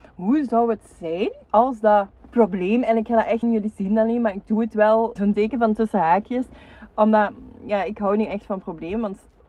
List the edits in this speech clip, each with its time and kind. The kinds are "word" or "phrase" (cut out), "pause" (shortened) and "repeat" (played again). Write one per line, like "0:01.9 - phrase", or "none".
0:01.4 - pause
0:02.2 - pause
0:03.4 - phrase
0:05.2 - word